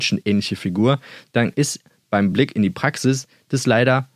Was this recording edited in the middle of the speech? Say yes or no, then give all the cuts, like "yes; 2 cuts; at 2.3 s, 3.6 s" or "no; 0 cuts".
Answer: no; 0 cuts